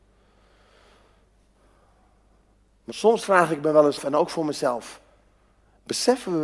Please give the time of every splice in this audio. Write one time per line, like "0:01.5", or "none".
0:02.9
0:04.0